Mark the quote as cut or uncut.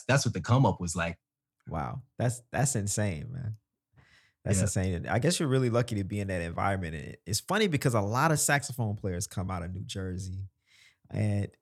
uncut